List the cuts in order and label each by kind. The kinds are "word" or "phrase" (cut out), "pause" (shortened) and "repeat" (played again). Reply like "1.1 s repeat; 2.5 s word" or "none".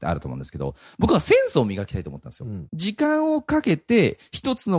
2.7 s pause